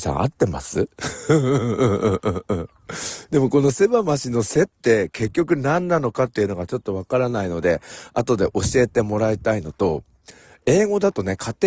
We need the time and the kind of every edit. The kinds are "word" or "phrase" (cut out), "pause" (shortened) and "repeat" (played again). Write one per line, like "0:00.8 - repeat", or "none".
none

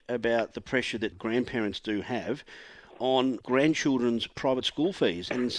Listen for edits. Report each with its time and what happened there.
0:01.1 - word
0:03.4 - word

